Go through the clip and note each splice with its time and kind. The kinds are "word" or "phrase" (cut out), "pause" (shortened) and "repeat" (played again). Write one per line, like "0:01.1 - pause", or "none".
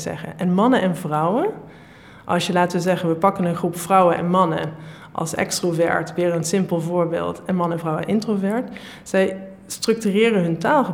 none